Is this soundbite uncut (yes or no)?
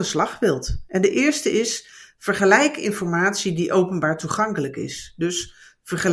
yes